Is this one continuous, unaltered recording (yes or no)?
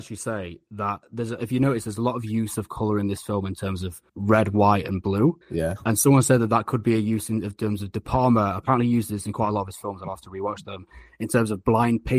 no